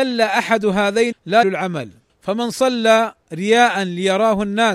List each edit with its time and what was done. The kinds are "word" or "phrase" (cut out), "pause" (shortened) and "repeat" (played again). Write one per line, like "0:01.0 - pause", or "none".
0:01.1 - word
0:01.4 - word
0:02.1 - pause
0:03.2 - word